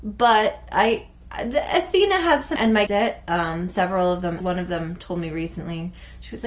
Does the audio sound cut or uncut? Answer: cut